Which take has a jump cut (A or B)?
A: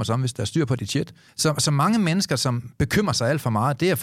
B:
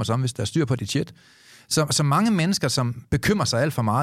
A